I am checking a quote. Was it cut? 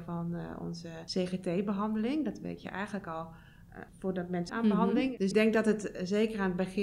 yes; 2 cuts; at 4.5 s, 5.3 s

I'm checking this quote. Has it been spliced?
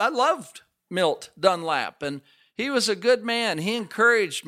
no; 0 cuts

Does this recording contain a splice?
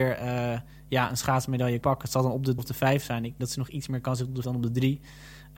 yes; 4 cuts; at 1.8 s, 2.6 s, 3.4 s, 4.4 s

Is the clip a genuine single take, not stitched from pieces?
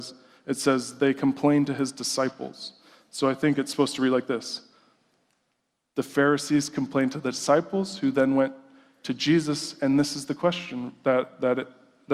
yes; 0 cuts

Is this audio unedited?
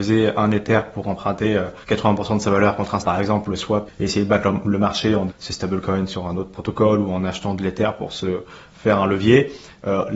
no; 4 cuts; at 1.8 s, 3.0 s, 3.9 s, 5.3 s

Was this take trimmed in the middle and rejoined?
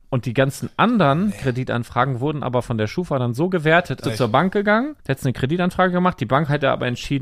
yes; 2 cuts; at 4.0 s, 5.0 s

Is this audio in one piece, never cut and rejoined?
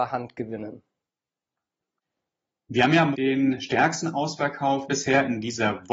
no; 2 cuts; at 3.1 s, 4.9 s

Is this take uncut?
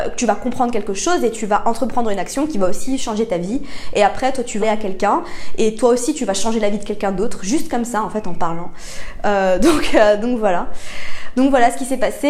no; 1 cut; at 4.6 s

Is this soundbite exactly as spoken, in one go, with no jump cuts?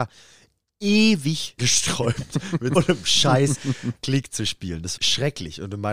no; 3 cuts; at 1.6 s, 2.8 s, 5.0 s

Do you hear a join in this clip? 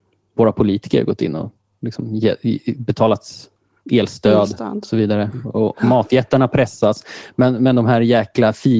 no; 0 cuts

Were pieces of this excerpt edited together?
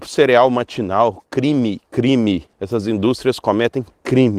yes; 1 cut; at 2.5 s

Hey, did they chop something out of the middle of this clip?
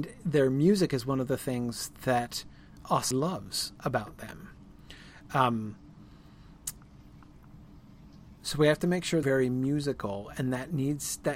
yes; 3 cuts; at 3.1 s, 8.4 s, 9.2 s

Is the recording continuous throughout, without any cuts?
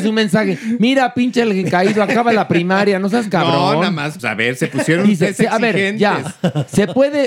no; 1 cut; at 4.2 s

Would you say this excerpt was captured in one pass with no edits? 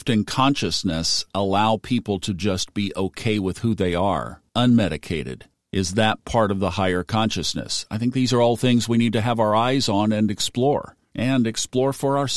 no; 2 cuts; at 4.5 s, 11.0 s

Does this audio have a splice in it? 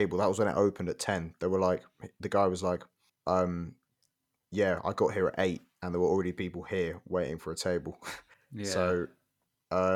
yes; 2 cuts; at 3.1 s, 8.3 s

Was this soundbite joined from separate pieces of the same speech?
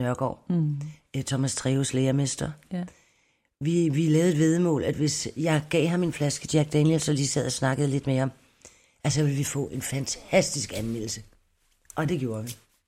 no; 0 cuts

